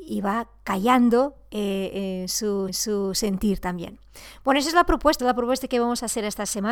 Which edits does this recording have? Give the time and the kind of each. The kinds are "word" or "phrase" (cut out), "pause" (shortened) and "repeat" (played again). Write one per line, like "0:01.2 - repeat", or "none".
0:02.7 - repeat
0:05.2 - word